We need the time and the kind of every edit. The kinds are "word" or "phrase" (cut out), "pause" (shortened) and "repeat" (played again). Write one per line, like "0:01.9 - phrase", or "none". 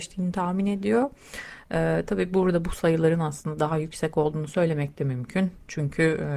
none

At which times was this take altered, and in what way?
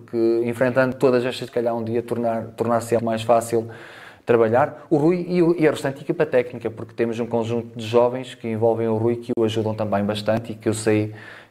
0:01.5 - word
0:03.0 - word

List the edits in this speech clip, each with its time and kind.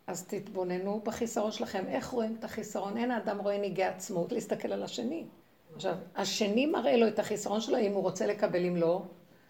0:04.3 - word
0:05.4 - pause

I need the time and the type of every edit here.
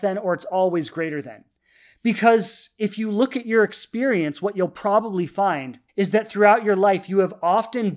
0:05.9 - pause

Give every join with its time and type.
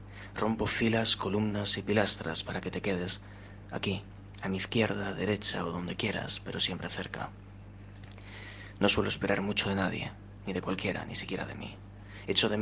none

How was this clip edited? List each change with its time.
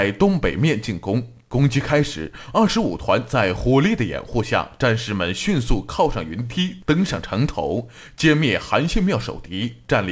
none

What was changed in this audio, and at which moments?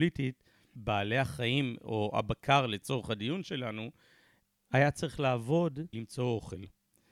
0:05.9 - word

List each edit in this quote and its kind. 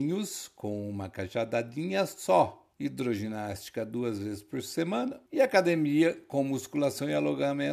0:02.7 - pause
0:05.3 - pause

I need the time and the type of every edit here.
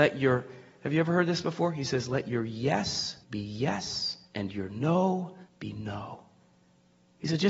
0:03.2 - pause
0:04.2 - pause
0:05.5 - pause

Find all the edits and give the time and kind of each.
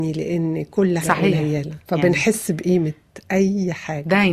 0:01.0 - phrase
0:01.8 - word

